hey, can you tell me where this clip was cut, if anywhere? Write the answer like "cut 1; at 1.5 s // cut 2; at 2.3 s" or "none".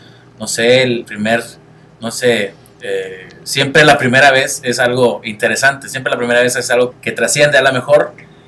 cut 1; at 1.0 s // cut 2; at 6.9 s